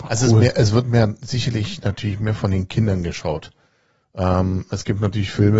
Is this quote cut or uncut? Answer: uncut